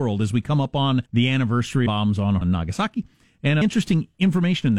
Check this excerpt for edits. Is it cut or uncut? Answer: cut